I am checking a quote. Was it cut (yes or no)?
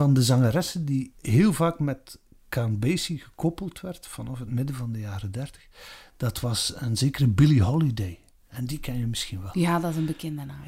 no